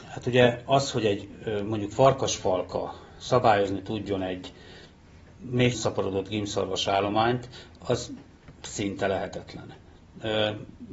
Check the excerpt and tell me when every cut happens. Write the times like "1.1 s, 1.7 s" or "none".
5.7 s